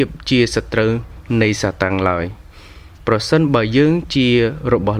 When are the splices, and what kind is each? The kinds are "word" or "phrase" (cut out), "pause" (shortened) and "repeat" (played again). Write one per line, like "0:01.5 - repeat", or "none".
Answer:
0:03.0 - pause